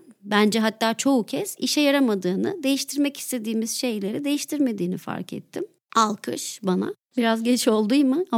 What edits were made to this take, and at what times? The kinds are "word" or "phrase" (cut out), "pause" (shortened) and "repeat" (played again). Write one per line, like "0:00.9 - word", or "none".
none